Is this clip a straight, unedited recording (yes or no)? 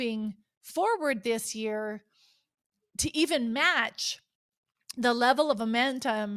yes